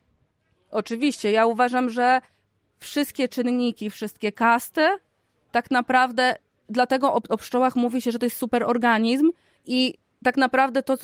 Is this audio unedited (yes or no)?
yes